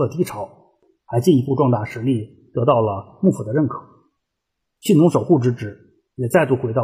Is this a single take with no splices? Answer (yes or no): yes